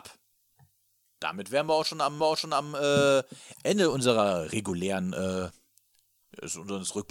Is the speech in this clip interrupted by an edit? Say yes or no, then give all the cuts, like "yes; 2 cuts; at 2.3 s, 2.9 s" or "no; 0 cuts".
yes; 1 cut; at 2.2 s